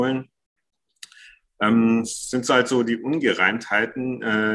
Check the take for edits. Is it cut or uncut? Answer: uncut